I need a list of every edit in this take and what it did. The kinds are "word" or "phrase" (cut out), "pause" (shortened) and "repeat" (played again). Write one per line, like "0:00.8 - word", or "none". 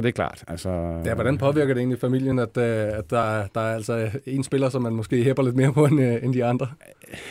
none